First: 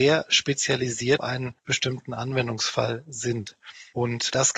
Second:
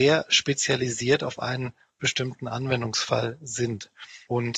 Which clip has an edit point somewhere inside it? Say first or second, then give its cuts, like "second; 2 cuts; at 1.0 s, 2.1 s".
first; 2 cuts; at 1.2 s, 1.6 s